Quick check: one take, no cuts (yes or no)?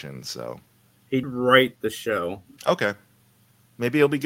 no